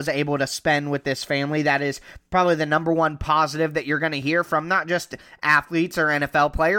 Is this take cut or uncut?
uncut